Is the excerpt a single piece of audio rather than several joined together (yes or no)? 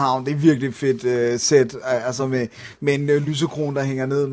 yes